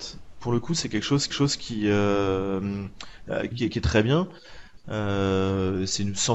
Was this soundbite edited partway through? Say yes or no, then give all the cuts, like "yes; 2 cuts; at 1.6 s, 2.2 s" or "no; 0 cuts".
yes; 2 cuts; at 1.3 s, 3.5 s